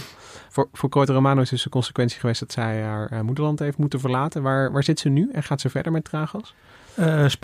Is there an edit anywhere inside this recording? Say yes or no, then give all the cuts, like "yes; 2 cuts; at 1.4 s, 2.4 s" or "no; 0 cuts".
no; 0 cuts